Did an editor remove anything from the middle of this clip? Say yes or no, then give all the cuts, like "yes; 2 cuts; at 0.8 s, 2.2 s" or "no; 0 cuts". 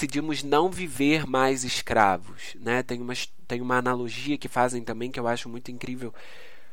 no; 0 cuts